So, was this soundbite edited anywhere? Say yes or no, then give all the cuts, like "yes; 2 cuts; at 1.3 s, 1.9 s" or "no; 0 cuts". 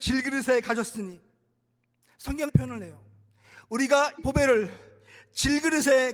yes; 2 cuts; at 2.5 s, 4.2 s